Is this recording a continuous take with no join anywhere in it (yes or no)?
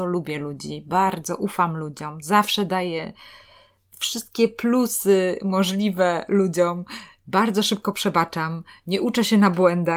yes